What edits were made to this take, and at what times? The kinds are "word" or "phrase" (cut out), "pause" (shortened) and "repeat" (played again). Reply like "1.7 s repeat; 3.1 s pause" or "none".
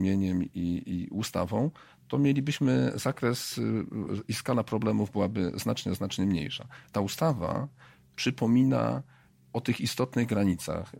none